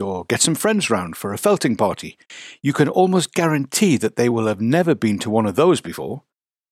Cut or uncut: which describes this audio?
uncut